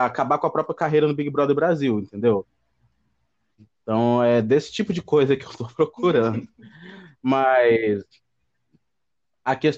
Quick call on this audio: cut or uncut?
uncut